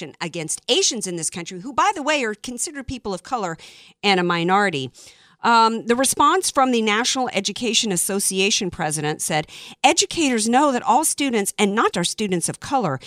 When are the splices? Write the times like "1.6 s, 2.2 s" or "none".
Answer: 11.9 s